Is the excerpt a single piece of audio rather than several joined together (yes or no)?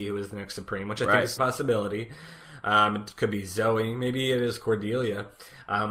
no